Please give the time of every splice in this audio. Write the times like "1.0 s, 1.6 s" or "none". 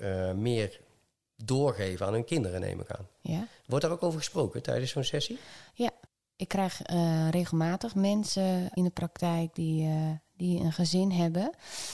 6.1 s, 8.8 s